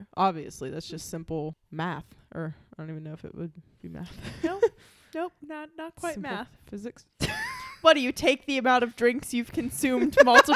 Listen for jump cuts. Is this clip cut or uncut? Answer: uncut